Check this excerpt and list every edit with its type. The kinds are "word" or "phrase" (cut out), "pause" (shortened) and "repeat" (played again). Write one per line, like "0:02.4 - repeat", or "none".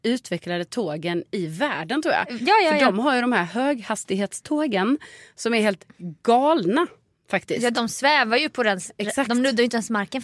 none